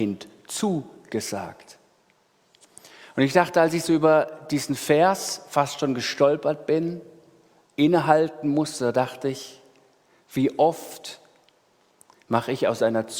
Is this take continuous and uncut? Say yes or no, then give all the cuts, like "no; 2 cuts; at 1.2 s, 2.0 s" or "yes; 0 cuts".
yes; 0 cuts